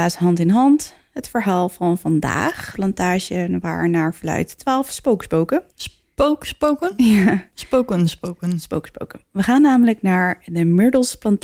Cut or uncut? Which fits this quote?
cut